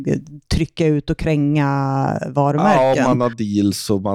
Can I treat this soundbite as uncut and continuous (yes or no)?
yes